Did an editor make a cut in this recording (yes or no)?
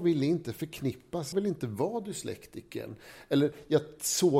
yes